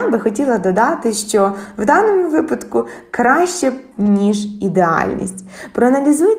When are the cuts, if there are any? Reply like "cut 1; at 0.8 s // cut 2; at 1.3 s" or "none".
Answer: cut 1; at 3.9 s